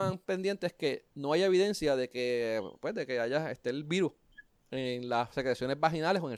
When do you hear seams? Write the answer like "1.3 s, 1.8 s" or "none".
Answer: none